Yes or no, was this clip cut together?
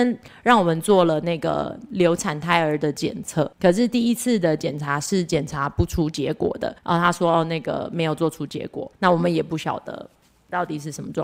yes